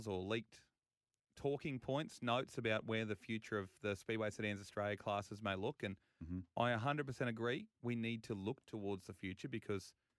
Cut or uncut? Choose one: uncut